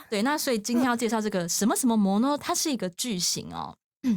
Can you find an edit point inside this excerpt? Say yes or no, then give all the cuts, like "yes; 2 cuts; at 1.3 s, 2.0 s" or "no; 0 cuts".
yes; 1 cut; at 2.4 s